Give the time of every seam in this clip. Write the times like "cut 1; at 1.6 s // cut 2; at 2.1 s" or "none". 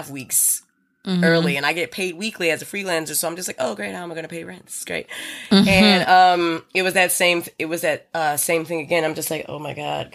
none